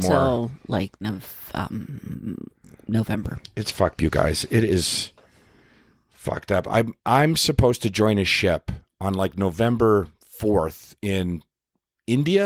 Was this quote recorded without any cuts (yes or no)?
no